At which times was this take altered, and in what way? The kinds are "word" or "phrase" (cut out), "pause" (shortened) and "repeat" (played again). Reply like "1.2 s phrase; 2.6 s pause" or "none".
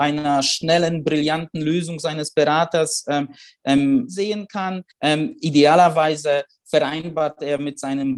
4.1 s phrase; 4.9 s pause